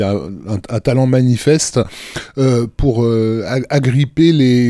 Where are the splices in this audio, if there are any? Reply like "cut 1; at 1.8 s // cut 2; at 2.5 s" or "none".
cut 1; at 2.7 s